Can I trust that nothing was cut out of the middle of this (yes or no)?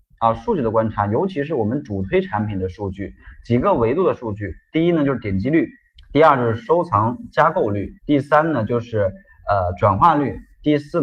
no